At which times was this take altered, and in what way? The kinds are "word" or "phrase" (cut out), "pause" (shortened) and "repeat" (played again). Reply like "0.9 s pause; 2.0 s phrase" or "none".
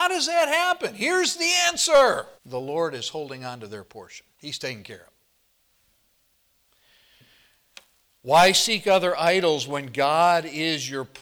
2.4 s pause; 4.3 s pause